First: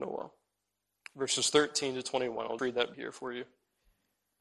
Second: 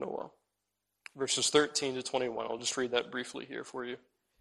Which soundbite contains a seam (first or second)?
first